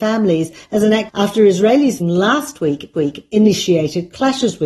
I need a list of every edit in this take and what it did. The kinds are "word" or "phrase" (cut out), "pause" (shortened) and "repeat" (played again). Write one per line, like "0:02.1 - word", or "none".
0:01.1 - phrase
0:02.0 - word
0:02.9 - repeat